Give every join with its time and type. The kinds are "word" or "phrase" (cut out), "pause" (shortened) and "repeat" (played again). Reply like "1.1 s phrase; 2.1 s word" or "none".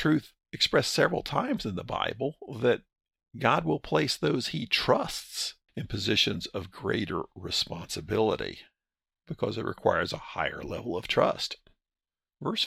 none